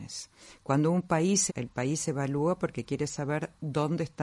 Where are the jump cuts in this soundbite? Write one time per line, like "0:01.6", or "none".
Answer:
0:01.5